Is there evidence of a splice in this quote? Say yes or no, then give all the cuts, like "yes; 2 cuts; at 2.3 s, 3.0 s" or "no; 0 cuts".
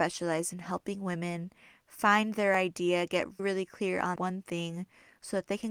yes; 2 cuts; at 3.4 s, 4.2 s